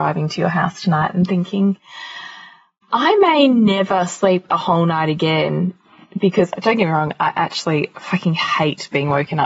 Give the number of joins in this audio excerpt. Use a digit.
0